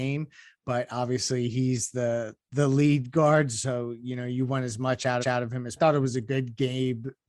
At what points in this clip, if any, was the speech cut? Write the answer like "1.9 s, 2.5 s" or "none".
5.2 s, 5.8 s